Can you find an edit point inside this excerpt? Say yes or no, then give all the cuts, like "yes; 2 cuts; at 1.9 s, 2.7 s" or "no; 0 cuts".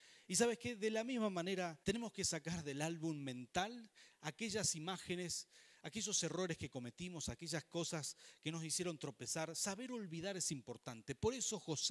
yes; 1 cut; at 1.8 s